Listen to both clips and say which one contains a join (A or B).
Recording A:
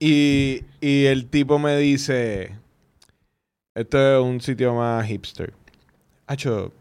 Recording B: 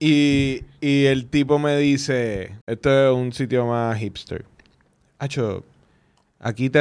B